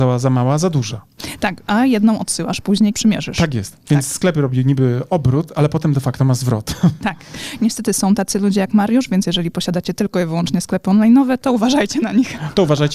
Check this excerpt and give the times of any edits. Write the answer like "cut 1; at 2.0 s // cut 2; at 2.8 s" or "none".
cut 1; at 2.9 s